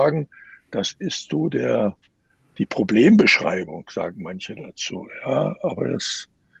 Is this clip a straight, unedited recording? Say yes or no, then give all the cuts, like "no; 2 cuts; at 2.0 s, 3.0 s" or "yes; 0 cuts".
yes; 0 cuts